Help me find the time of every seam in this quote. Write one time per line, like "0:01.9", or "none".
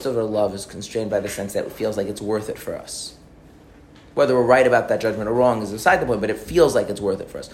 none